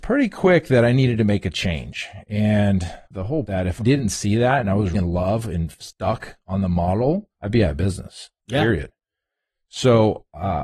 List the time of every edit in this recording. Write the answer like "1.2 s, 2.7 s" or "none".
3.0 s, 3.4 s, 3.8 s, 4.9 s, 7.3 s, 8.4 s